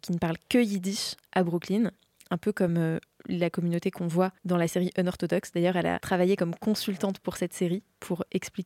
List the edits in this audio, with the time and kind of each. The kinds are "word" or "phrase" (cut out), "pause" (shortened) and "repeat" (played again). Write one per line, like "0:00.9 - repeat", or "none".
none